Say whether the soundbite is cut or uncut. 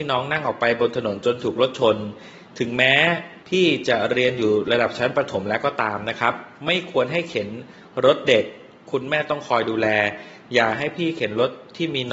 cut